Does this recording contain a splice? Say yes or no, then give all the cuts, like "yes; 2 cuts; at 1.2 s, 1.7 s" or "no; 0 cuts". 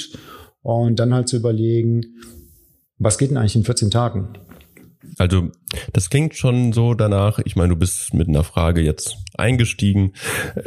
no; 0 cuts